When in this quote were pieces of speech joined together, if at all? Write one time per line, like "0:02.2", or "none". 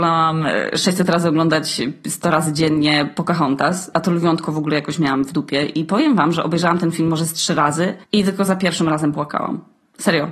0:03.9
0:08.0